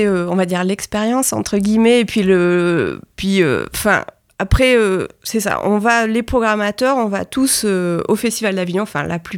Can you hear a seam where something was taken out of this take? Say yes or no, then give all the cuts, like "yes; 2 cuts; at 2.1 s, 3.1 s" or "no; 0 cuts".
no; 0 cuts